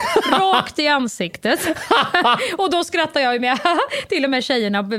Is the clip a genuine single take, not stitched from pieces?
yes; 0 cuts

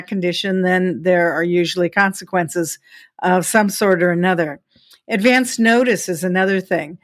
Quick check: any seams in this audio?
no; 0 cuts

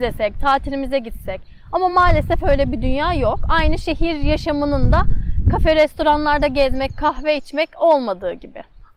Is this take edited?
no; 0 cuts

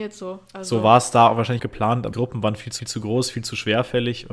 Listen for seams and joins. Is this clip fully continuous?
no; 3 cuts; at 1.6 s, 2.1 s, 2.8 s

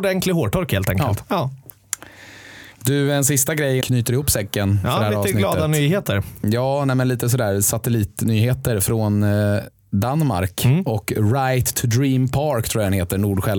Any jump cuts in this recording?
yes; 2 cuts; at 2.7 s, 3.8 s

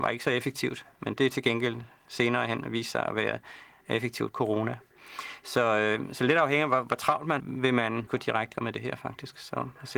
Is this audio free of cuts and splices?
no; 4 cuts; at 4.3 s, 7.4 s, 8.1 s, 8.5 s

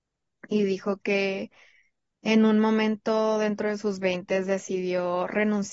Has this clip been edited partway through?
no; 0 cuts

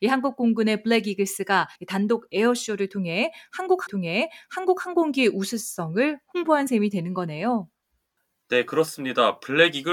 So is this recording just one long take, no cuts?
no; 2 cuts; at 1.8 s, 3.9 s

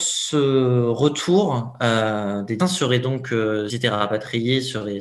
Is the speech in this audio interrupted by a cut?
yes; 2 cuts; at 2.6 s, 3.7 s

